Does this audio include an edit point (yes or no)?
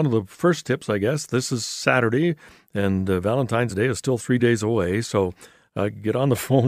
no